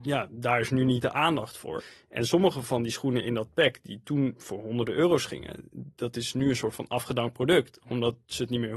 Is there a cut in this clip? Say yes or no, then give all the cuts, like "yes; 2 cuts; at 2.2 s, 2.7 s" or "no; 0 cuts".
no; 0 cuts